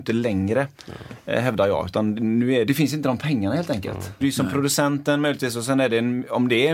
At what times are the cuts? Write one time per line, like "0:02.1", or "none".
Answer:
0:02.7
0:04.2